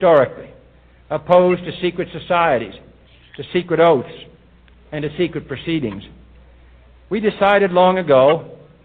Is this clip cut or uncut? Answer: uncut